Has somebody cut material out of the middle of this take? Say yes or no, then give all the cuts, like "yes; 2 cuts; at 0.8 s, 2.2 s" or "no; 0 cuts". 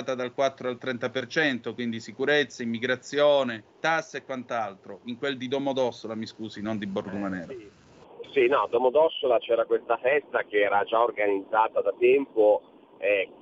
yes; 1 cut; at 3.7 s